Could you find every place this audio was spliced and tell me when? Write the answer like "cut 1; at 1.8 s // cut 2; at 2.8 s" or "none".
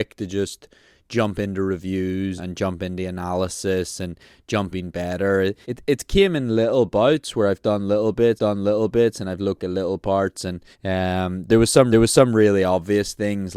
cut 1; at 2.4 s // cut 2; at 4.7 s // cut 3; at 5.6 s // cut 4; at 8.4 s // cut 5; at 9.6 s // cut 6; at 10.7 s // cut 7; at 11.9 s

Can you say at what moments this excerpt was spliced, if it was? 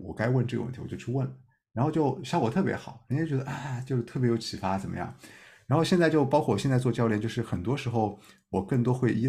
none

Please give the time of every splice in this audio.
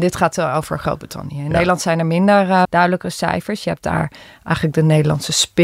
cut 1; at 2.6 s

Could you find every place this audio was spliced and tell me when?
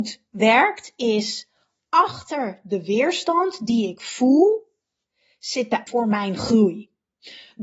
cut 1; at 5.9 s

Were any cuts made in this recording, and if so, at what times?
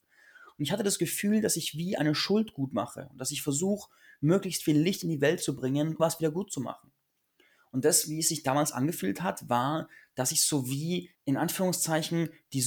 cut 1; at 6.0 s // cut 2; at 11.1 s

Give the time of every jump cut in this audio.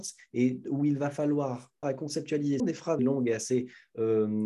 cut 1; at 1.8 s // cut 2; at 2.6 s // cut 3; at 3.0 s

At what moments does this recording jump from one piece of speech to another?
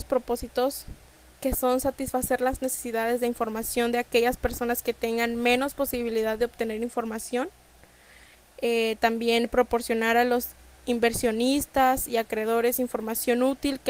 none

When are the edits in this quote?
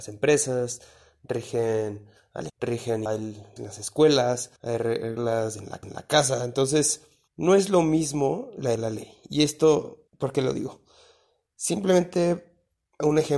cut 1; at 2.5 s // cut 2; at 3.1 s // cut 3; at 3.6 s // cut 4; at 4.6 s // cut 5; at 5.8 s // cut 6; at 7.3 s // cut 7; at 8.8 s // cut 8; at 10.1 s

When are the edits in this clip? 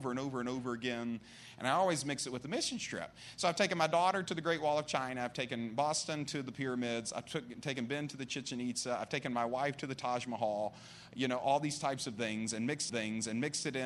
cut 1; at 12.9 s

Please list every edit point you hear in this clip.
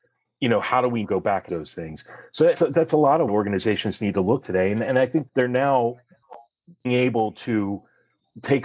cut 1; at 1.0 s // cut 2; at 1.5 s // cut 3; at 2.5 s // cut 4; at 3.3 s // cut 5; at 4.4 s // cut 6; at 5.3 s // cut 7; at 6.8 s

